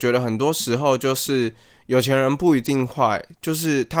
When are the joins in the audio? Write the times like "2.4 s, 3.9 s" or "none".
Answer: none